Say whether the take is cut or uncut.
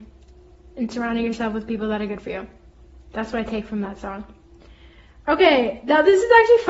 uncut